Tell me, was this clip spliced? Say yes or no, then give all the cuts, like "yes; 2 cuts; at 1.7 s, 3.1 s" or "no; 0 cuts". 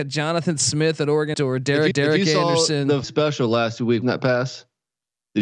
yes; 4 cuts; at 1.3 s, 1.9 s, 3.0 s, 4.0 s